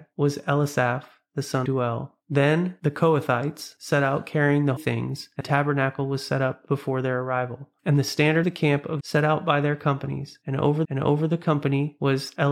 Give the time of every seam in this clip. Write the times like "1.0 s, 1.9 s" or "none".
1.6 s, 4.8 s, 5.4 s, 8.4 s, 9.0 s, 10.8 s